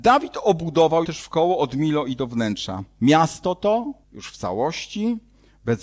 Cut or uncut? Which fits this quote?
cut